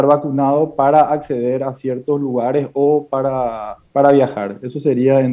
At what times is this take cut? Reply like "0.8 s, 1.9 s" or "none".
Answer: 3.9 s

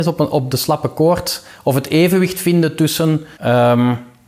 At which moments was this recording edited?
3.3 s

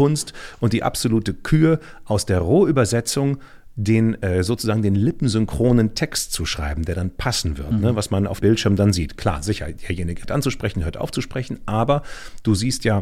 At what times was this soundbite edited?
8.4 s, 10.2 s

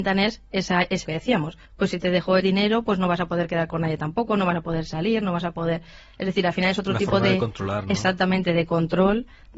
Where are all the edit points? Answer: 1.0 s, 1.7 s, 2.4 s

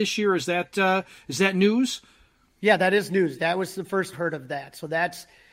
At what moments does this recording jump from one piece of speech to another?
4.1 s

